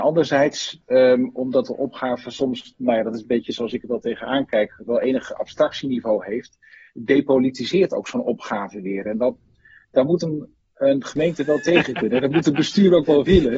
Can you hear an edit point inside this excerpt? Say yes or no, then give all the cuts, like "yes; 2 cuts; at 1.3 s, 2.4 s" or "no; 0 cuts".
no; 0 cuts